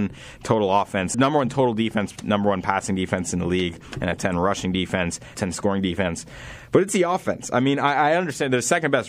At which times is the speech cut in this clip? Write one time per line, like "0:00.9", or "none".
0:01.1
0:04.2
0:05.3

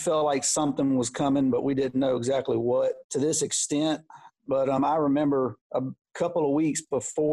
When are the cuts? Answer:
none

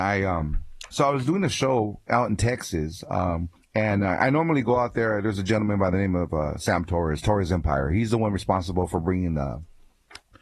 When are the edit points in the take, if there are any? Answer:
0:03.6

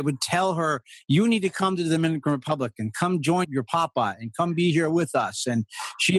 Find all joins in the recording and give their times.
0:03.4

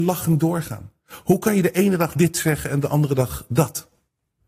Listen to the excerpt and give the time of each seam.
none

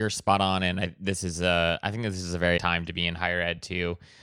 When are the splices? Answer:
0:02.6

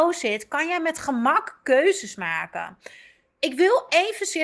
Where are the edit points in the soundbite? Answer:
none

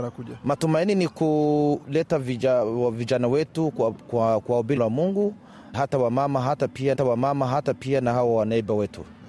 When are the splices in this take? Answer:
0:04.8
0:05.7
0:06.9

